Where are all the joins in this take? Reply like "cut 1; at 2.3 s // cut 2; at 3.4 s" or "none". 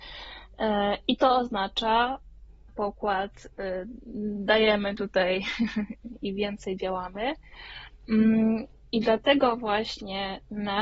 cut 1; at 2.7 s // cut 2; at 6.2 s